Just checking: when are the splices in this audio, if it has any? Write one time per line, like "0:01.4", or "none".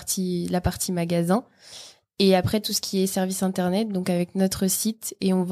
none